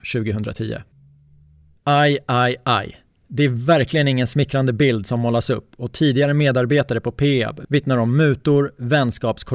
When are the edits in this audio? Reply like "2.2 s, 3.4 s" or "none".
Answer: none